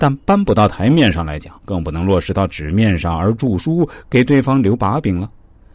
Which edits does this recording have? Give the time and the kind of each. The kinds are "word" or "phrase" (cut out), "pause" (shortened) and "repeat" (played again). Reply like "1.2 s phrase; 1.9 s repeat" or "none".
1.6 s pause